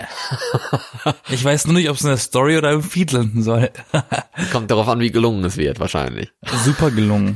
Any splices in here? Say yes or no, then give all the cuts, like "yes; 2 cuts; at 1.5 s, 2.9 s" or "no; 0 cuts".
no; 0 cuts